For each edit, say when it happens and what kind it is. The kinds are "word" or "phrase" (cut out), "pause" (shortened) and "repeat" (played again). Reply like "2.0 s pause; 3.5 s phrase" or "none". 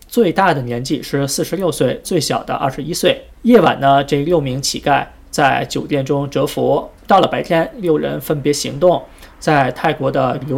3.3 s pause